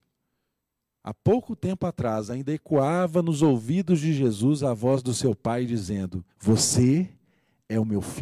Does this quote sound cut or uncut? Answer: cut